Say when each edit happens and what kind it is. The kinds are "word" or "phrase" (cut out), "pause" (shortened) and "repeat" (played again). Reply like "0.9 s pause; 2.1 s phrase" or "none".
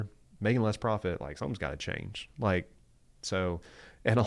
none